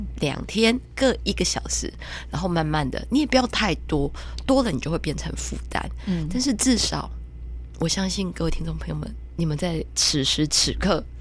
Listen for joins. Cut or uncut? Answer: uncut